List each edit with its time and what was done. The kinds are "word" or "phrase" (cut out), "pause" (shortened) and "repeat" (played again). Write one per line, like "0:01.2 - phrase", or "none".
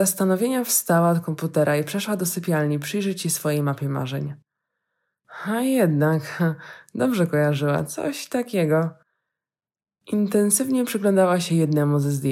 none